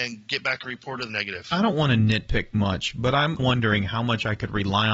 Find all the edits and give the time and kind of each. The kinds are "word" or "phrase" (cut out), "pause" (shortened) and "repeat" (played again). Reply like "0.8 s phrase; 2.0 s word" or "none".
1.1 s phrase; 2.5 s word; 3.4 s phrase

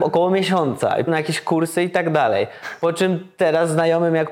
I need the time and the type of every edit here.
1.1 s word

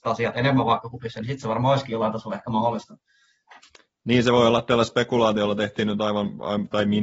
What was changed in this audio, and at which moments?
none

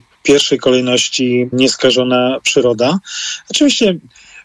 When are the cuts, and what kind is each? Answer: 1.5 s word

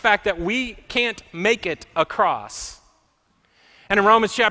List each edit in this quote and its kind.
none

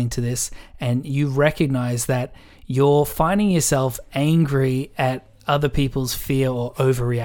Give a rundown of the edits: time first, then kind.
none

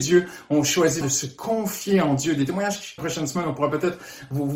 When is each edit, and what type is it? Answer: 1.0 s word; 3.0 s phrase

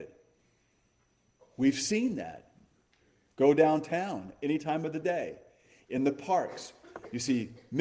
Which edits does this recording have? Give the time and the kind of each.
none

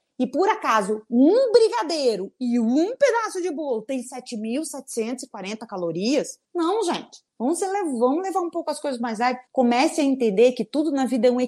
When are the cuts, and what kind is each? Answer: 6.4 s pause; 7.3 s pause; 9.5 s pause

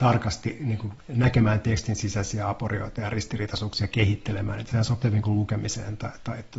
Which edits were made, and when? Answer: 1.0 s word; 5.0 s word

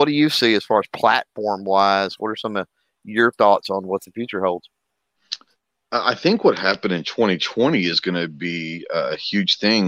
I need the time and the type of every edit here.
none

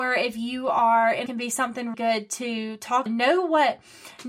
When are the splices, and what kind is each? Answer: 1.3 s phrase; 1.9 s word; 3.1 s word

